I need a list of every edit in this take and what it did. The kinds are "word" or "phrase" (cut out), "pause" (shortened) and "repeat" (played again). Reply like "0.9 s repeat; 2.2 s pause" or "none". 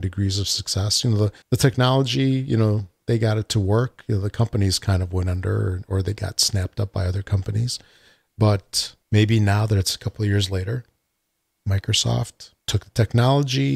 1.4 s pause; 9.0 s pause; 12.6 s pause